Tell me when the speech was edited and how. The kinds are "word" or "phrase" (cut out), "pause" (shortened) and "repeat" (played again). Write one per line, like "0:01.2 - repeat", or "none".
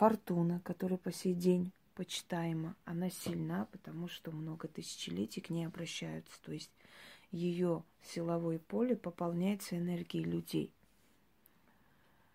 none